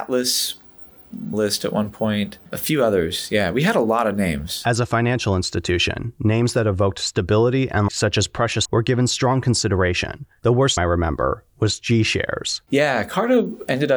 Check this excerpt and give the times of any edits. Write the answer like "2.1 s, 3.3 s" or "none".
1.3 s, 2.5 s, 7.9 s, 8.6 s, 10.8 s

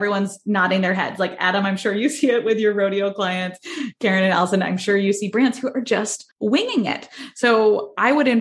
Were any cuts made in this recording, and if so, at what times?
6.3 s

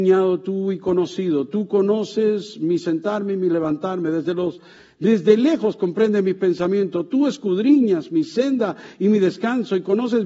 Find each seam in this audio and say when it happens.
none

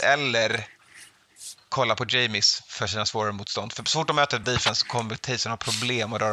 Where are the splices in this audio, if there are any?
1.6 s, 4.4 s

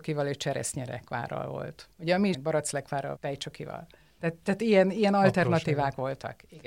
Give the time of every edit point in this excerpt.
1.9 s, 2.3 s, 3.2 s

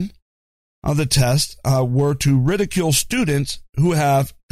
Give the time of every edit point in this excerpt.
none

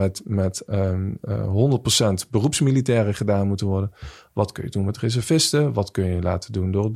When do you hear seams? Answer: none

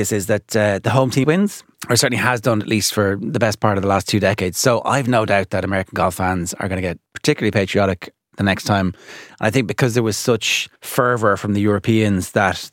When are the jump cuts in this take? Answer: 1.2 s, 1.7 s, 7.1 s, 10.8 s

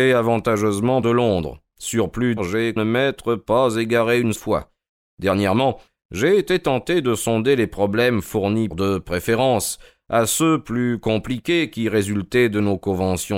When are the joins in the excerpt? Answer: 1.0 s, 2.4 s, 2.8 s, 4.4 s, 8.7 s

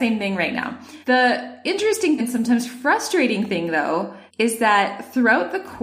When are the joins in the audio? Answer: 1.0 s, 2.2 s, 4.3 s

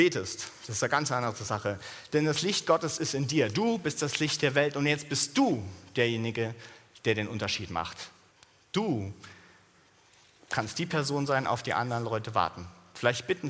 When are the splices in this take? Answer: 8.3 s

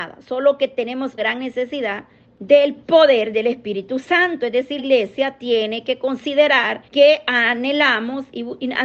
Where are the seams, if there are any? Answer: 1.2 s, 2.2 s, 4.8 s, 6.9 s

